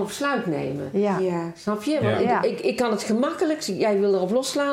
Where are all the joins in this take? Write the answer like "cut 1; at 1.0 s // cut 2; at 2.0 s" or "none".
none